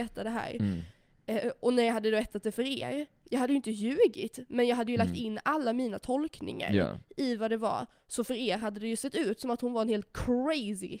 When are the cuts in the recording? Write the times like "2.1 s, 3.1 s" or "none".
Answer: none

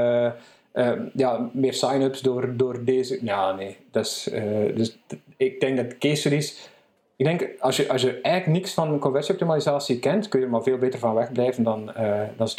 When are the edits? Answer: none

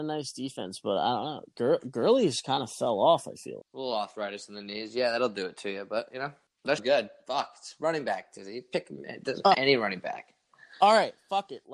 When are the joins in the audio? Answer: 3.6 s, 6.8 s, 9.5 s

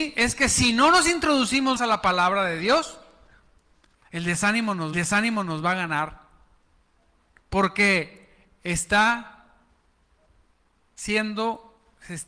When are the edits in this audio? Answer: 1.8 s, 4.9 s

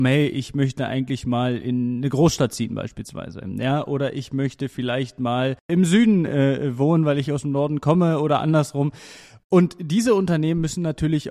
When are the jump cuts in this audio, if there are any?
none

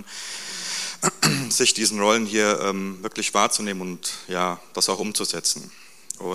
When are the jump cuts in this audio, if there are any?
none

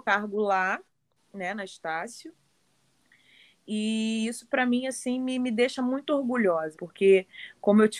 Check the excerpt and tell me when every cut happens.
6.7 s

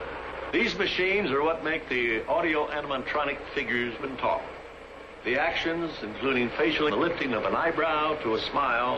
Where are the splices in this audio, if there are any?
4.0 s, 6.9 s

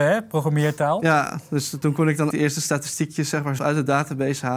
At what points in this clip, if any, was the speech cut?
2.3 s, 3.6 s

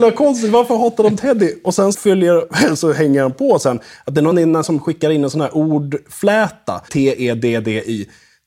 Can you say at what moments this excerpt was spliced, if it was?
1.9 s, 4.3 s, 4.6 s, 6.9 s

